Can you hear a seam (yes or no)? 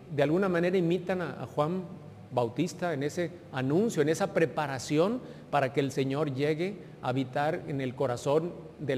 no